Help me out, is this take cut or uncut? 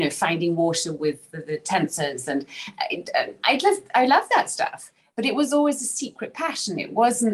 uncut